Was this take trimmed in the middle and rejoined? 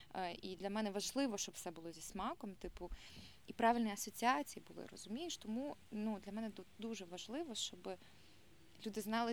no; 0 cuts

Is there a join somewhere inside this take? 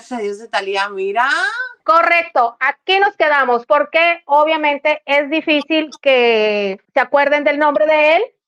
yes; 2 cuts; at 1.8 s, 6.8 s

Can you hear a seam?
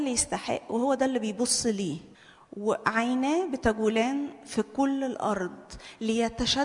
yes; 1 cut; at 2.1 s

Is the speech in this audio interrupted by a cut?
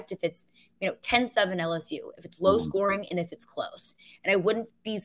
no; 0 cuts

